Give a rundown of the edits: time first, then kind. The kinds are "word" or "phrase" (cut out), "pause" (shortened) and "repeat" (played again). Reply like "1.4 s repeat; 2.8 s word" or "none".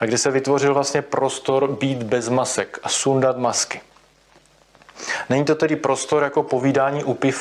none